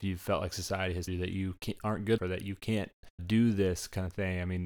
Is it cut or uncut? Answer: cut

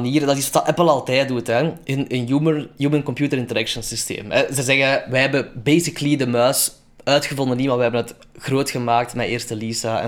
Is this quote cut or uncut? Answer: uncut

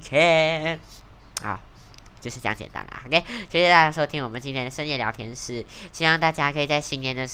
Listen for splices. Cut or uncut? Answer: uncut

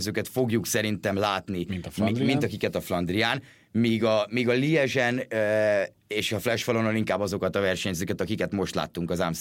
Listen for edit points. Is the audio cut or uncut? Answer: uncut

